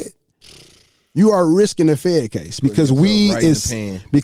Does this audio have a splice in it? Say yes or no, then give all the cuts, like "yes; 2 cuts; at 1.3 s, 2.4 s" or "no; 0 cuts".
no; 0 cuts